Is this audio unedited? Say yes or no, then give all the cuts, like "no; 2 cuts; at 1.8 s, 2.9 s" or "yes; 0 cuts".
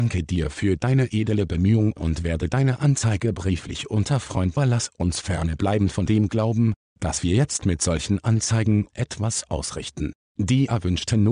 no; 1 cut; at 4.6 s